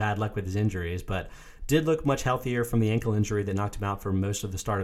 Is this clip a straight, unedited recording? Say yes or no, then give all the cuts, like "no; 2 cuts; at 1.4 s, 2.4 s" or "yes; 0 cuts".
yes; 0 cuts